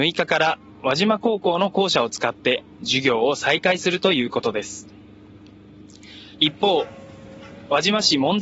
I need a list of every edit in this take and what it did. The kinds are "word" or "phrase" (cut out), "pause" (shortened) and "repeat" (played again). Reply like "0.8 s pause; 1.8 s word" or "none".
6.3 s pause